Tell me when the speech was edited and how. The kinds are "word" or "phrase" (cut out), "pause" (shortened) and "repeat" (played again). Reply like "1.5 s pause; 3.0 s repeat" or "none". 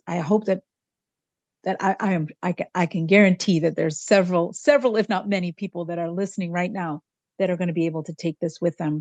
none